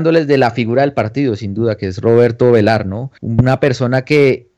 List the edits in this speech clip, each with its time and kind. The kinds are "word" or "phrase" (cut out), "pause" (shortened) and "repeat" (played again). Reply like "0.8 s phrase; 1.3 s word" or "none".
3.2 s pause